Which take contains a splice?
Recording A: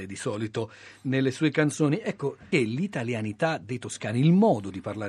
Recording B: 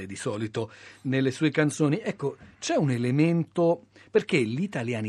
A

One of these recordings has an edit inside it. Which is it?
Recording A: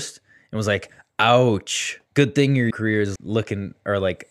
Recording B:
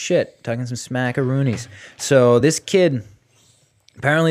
A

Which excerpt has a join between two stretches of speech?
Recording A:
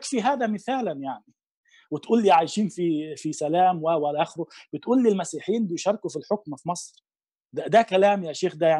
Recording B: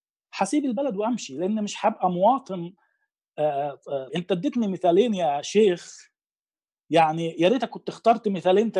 B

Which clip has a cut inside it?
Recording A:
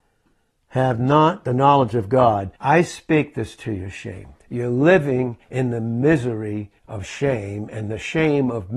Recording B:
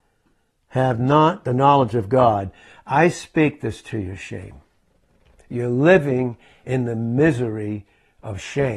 A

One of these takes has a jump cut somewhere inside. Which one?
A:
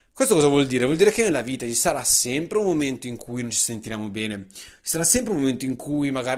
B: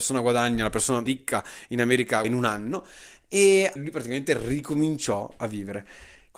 B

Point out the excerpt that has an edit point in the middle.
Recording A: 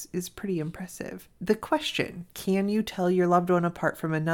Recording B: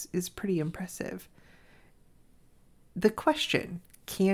A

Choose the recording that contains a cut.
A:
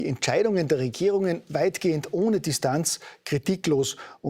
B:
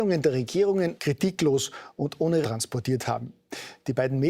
B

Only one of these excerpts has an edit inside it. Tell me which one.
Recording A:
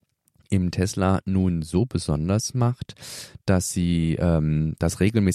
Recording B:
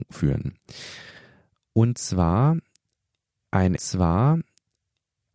B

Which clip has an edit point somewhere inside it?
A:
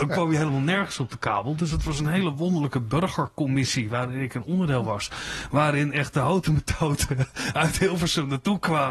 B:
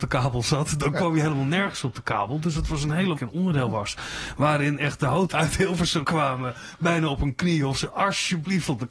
B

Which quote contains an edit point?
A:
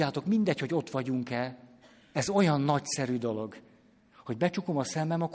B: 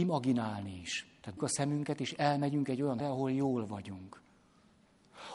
B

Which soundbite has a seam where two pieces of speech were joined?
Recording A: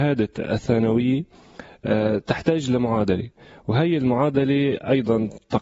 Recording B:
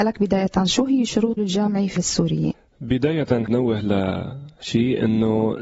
B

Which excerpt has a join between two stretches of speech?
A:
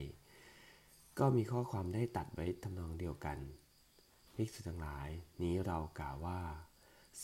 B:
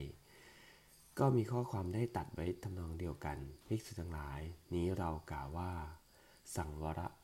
B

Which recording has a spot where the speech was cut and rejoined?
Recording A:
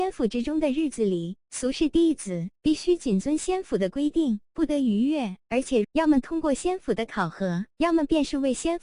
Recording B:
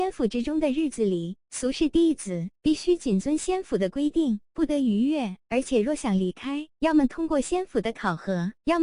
A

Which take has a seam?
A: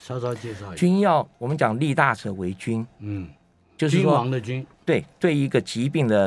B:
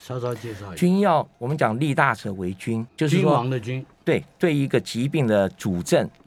B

